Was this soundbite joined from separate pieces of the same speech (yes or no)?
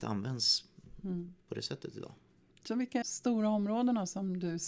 yes